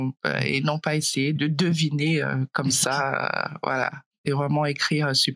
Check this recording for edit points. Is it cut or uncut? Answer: cut